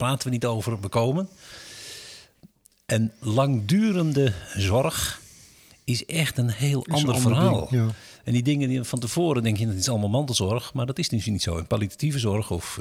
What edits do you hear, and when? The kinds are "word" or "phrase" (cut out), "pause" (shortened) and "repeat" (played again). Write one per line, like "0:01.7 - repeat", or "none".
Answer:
none